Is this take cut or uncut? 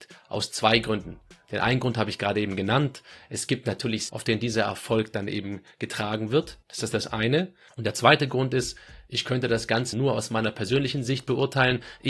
cut